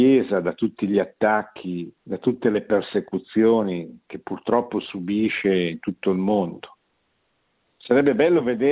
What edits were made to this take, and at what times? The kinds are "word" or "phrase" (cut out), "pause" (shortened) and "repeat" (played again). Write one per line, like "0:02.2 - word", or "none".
0:02.0 - pause